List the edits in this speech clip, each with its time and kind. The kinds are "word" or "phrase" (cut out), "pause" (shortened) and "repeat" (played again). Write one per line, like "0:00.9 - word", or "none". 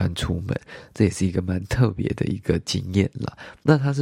none